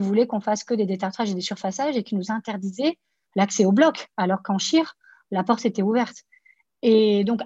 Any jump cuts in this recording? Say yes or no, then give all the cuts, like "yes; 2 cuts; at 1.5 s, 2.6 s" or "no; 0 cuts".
no; 0 cuts